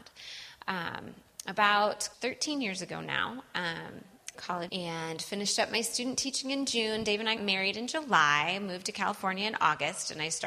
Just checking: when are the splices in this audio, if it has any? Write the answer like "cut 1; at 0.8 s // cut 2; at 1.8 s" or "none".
cut 1; at 2.1 s // cut 2; at 4.3 s // cut 3; at 4.7 s // cut 4; at 7.4 s